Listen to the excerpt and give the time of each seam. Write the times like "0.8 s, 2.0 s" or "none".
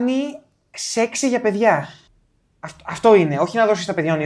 2.1 s